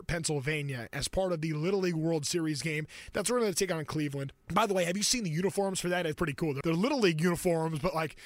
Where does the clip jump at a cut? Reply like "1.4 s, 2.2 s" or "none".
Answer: 4.4 s, 6.1 s, 6.6 s